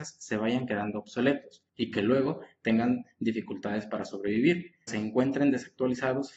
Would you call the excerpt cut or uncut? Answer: cut